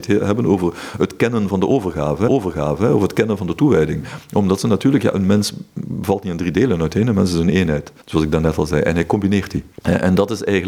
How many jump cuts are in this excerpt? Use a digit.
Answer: 3